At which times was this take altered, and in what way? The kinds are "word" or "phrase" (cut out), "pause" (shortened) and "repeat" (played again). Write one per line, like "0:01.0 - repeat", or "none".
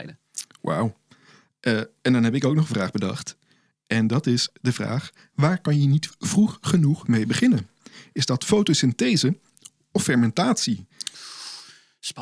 none